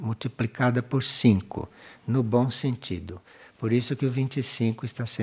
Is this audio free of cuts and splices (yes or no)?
yes